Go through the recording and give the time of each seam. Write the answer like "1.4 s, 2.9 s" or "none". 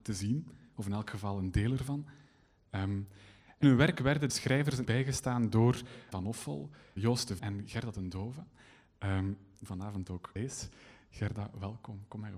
3.6 s, 4.3 s, 4.8 s, 6.1 s, 7.0 s, 7.4 s, 9.7 s, 10.4 s